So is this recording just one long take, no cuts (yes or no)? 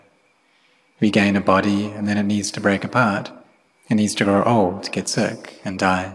yes